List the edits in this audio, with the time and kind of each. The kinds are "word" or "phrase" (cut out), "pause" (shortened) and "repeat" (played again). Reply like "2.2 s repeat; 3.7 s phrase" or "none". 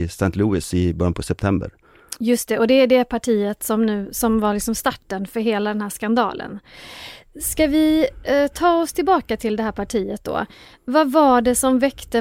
none